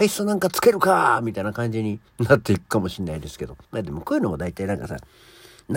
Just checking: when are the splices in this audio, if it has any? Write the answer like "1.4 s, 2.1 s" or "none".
2.1 s, 3.6 s